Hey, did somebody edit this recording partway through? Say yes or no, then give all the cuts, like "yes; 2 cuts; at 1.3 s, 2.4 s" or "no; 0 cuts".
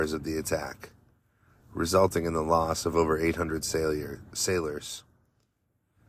no; 0 cuts